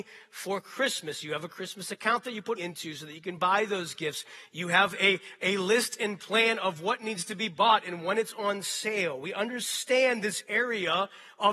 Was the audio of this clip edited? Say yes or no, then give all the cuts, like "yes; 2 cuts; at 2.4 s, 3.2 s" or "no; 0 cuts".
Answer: yes; 1 cut; at 2.6 s